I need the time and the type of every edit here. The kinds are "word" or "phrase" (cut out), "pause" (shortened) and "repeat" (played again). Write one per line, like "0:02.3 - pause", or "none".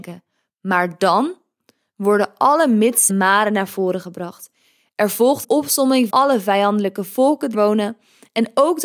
0:03.1 - word
0:05.4 - word
0:06.1 - word
0:07.5 - word